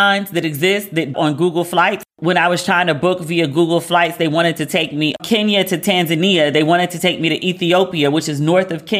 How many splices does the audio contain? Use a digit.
2